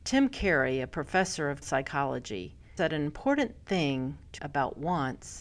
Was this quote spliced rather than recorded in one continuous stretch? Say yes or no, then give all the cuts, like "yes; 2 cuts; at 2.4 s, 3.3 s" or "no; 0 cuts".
yes; 3 cuts; at 1.6 s, 2.8 s, 4.4 s